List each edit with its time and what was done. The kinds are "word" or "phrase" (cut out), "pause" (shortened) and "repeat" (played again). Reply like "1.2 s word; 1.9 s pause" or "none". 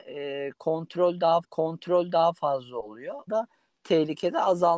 1.4 s repeat; 3.3 s phrase